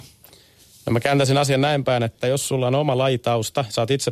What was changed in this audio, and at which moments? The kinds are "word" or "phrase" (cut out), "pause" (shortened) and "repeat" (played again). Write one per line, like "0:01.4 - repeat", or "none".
none

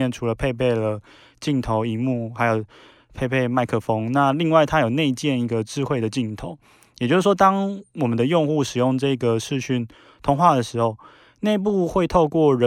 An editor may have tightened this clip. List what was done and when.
none

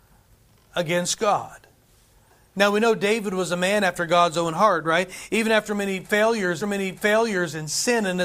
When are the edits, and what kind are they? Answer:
0:06.6 - repeat

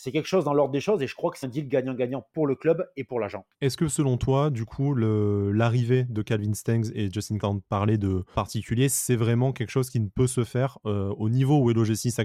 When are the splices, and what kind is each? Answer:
0:01.4 - word
0:03.5 - pause
0:07.4 - word
0:08.3 - phrase

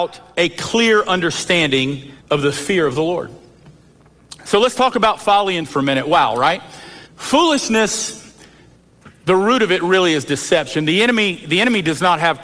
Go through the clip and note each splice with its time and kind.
0:02.2 - pause
0:05.7 - word
0:07.1 - pause

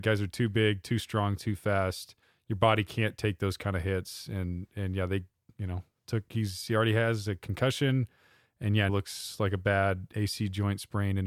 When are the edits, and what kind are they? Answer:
0:08.9 - word

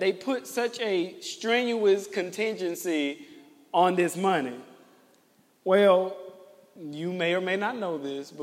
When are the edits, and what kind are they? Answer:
none

